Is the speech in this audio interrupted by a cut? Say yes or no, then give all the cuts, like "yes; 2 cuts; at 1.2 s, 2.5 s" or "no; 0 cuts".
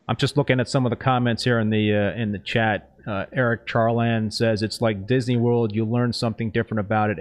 no; 0 cuts